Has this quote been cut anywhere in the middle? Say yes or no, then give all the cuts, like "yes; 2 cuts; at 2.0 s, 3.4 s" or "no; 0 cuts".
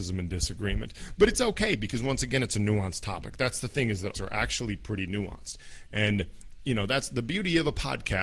yes; 1 cut; at 4.1 s